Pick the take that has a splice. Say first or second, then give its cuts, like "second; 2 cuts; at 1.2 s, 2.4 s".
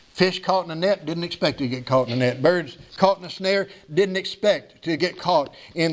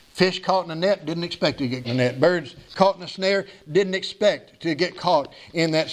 second; 1 cut; at 1.8 s